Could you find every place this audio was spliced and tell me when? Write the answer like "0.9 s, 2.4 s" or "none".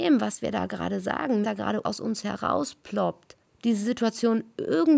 1.4 s, 1.8 s, 3.4 s